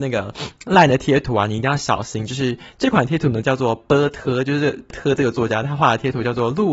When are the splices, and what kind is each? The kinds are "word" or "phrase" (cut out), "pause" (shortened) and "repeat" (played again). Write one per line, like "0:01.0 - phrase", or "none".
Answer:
0:04.9 - word